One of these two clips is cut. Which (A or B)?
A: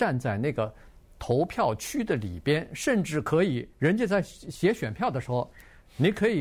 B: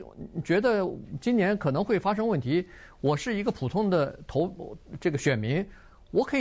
A